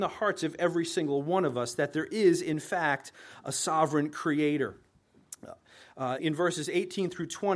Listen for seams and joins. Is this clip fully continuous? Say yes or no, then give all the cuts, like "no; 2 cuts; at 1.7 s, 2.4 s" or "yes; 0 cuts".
no; 1 cut; at 6.2 s